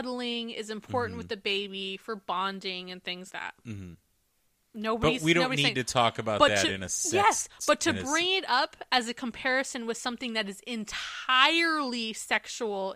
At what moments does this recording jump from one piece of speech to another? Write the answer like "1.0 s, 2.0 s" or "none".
3.3 s